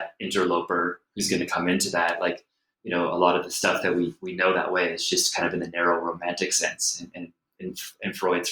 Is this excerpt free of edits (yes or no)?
yes